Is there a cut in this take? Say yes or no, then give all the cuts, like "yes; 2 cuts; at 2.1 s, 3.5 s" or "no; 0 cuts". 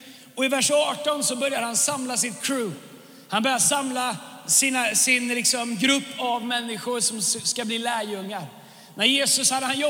no; 0 cuts